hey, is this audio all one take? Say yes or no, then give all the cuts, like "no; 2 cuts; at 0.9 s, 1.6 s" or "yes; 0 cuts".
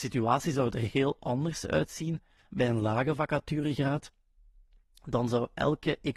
yes; 0 cuts